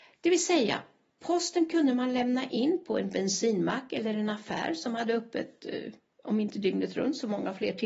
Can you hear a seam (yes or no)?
no